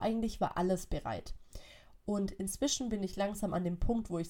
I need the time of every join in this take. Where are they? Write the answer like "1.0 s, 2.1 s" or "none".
none